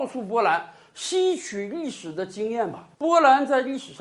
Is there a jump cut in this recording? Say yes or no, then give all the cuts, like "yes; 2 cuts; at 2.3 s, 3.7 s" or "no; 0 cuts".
yes; 1 cut; at 2.9 s